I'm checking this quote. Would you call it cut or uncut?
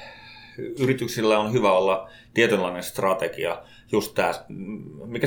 uncut